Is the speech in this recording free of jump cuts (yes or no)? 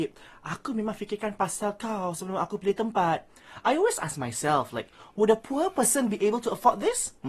yes